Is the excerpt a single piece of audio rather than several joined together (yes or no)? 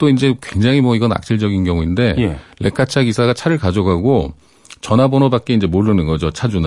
yes